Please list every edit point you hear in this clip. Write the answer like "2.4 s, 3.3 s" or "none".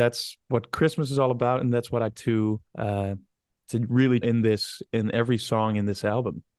2.1 s, 2.7 s, 4.2 s